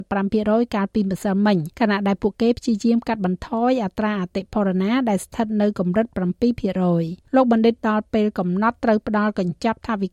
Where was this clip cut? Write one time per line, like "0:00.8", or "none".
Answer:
0:01.7
0:07.3
0:07.8